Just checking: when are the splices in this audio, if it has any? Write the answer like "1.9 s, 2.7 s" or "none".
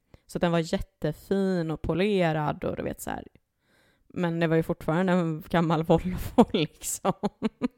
none